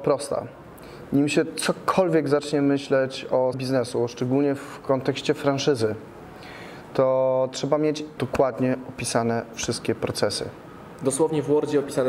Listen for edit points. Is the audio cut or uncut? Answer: cut